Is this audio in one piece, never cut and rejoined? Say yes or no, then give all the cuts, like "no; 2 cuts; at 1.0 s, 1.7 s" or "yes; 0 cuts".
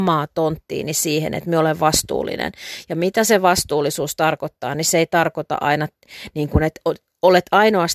yes; 0 cuts